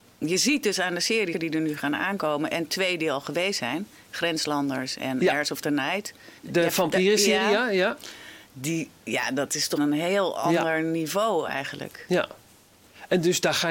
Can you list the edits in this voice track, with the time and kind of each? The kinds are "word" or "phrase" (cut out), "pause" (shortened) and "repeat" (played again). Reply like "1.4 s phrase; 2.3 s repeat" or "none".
1.3 s word; 6.4 s pause; 9.8 s word

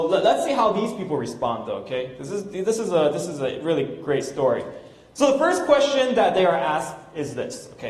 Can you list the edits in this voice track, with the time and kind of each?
none

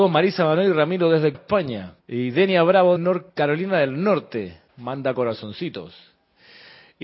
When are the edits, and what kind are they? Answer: 1.3 s word; 2.0 s pause; 3.0 s word; 3.3 s pause; 4.7 s pause

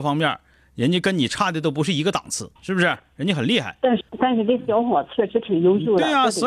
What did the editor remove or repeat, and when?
2.6 s pause; 4.1 s pause

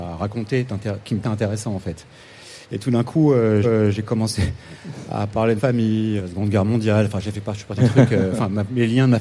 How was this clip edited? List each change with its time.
1.2 s word; 2.6 s pause; 3.6 s repeat; 5.6 s word; 6.2 s word; 7.3 s phrase; 7.8 s word

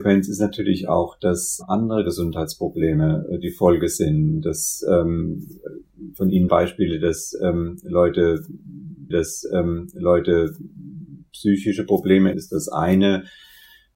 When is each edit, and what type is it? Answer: 6.5 s word; 9.1 s repeat; 12.3 s word

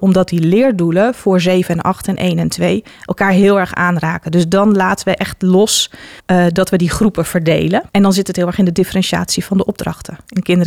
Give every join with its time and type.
6.2 s pause; 7.9 s pause

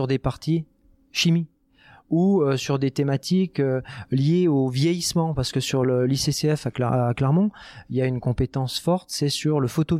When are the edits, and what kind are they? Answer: none

